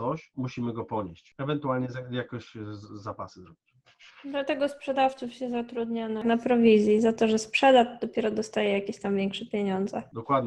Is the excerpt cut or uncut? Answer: uncut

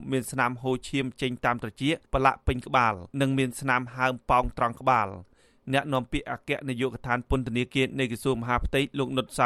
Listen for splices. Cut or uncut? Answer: cut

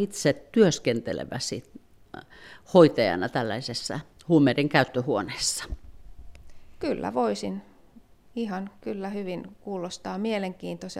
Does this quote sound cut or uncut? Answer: uncut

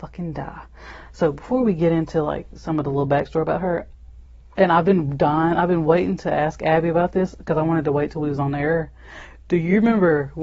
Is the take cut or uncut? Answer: uncut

